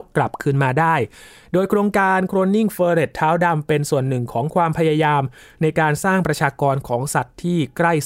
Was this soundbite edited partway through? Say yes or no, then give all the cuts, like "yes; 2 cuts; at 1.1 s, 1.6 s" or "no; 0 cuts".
no; 0 cuts